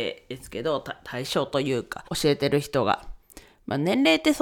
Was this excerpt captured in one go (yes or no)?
no